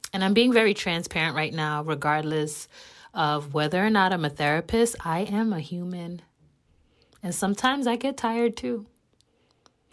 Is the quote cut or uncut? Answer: uncut